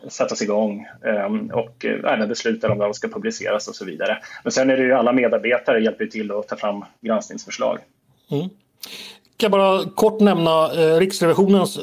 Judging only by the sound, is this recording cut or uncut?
uncut